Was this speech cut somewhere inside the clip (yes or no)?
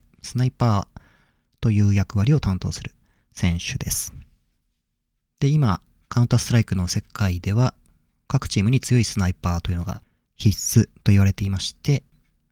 no